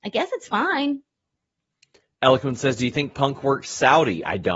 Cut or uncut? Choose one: uncut